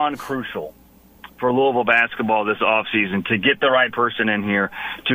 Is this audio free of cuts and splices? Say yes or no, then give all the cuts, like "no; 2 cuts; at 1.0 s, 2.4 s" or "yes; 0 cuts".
yes; 0 cuts